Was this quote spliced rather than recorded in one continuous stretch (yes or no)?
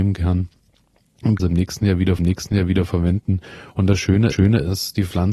yes